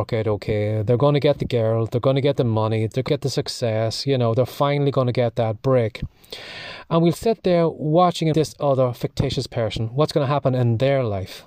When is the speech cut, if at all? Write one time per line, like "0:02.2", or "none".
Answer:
0:03.1
0:08.3